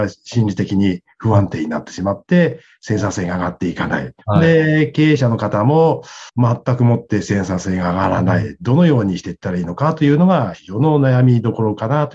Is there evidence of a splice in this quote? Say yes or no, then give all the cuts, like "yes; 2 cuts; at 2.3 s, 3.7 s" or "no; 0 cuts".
yes; 3 cuts; at 4.2 s, 6.3 s, 10.5 s